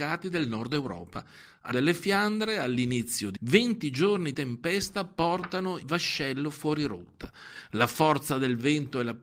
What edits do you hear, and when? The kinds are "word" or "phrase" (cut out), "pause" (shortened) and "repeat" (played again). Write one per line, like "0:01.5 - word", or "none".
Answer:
0:01.7 - word
0:03.4 - word
0:04.3 - word
0:05.8 - word